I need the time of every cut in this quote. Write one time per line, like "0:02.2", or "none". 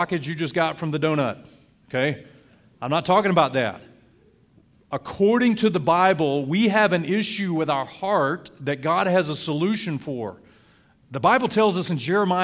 none